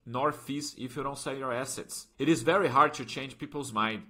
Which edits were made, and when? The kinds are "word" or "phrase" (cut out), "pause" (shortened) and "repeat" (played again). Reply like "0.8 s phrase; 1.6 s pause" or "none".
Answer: 2.1 s pause